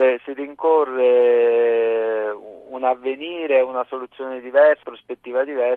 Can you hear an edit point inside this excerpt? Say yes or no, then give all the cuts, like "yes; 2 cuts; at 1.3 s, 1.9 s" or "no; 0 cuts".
yes; 1 cut; at 4.8 s